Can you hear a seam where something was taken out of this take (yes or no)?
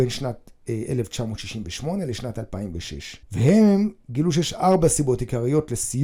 yes